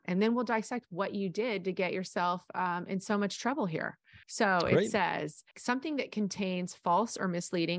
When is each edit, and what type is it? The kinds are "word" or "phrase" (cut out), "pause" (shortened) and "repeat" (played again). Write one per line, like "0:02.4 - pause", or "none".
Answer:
0:04.2 - pause
0:05.5 - word